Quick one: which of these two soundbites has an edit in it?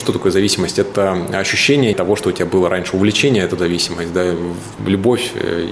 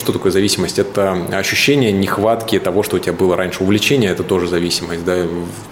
first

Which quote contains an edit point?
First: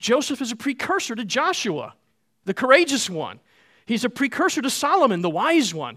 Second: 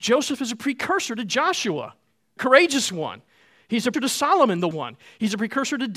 second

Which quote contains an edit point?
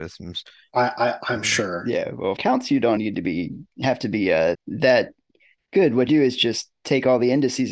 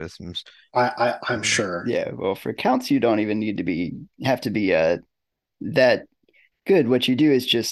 first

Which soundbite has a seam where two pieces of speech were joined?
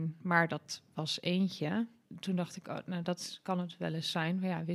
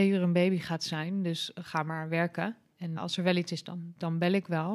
second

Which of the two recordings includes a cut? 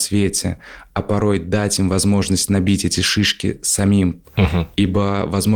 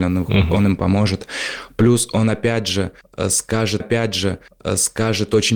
second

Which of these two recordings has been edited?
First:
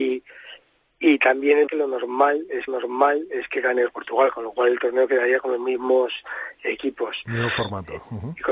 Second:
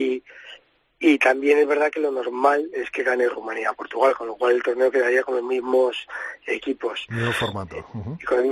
first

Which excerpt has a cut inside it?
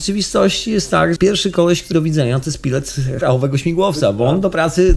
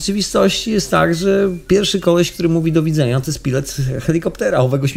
first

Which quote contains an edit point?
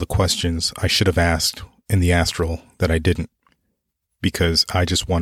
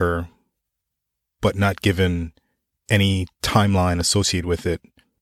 second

